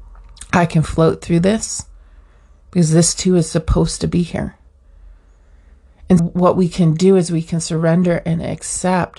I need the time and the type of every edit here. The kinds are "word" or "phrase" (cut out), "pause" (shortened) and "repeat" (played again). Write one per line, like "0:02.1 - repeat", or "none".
0:06.2 - word